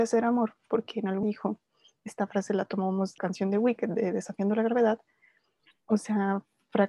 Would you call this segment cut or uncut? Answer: cut